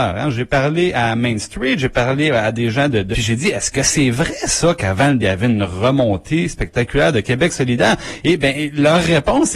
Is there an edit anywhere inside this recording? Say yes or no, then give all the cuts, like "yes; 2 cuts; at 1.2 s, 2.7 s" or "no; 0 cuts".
yes; 2 cuts; at 3.1 s, 5.2 s